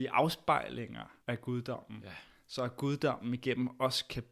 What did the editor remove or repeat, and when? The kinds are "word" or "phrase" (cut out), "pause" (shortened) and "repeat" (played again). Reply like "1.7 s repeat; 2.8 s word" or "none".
1.2 s pause